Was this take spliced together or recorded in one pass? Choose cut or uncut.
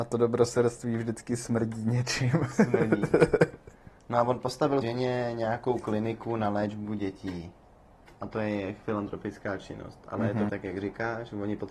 cut